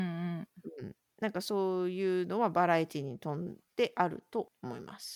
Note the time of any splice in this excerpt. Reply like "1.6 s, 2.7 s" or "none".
1.0 s